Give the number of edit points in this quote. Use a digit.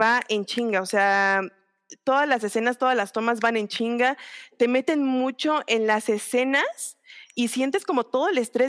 0